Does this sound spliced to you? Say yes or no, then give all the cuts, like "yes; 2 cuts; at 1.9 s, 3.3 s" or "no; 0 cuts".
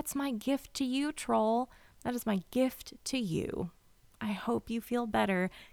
no; 0 cuts